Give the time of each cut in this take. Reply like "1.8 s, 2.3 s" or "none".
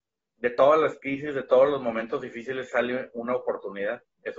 none